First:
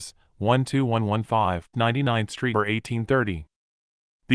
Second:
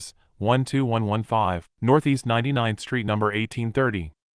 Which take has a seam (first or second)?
first